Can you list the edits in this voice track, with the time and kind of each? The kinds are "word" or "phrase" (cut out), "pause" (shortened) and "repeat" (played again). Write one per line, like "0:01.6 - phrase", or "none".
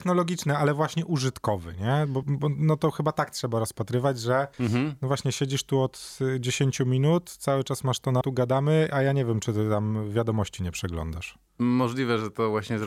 0:02.2 - word
0:04.5 - pause
0:08.2 - phrase